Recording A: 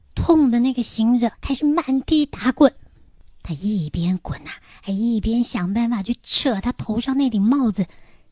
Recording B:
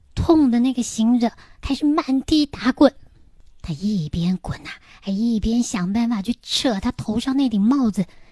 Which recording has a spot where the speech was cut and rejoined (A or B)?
A